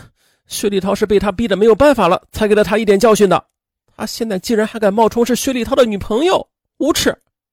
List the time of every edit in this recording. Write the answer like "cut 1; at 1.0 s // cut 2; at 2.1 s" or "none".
none